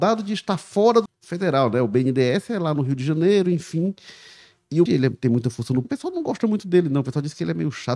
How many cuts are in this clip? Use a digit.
3